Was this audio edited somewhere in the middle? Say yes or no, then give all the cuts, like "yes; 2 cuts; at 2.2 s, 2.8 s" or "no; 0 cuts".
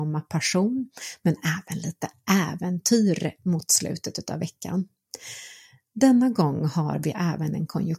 no; 0 cuts